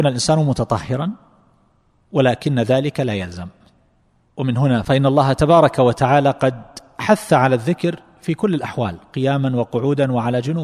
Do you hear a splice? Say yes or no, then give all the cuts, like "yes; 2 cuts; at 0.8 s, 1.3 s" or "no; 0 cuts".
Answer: no; 0 cuts